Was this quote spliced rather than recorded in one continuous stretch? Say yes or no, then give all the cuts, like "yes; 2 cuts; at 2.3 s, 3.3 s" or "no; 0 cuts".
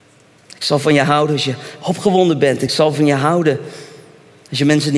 no; 0 cuts